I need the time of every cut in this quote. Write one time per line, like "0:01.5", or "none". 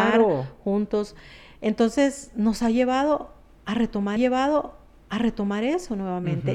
0:04.2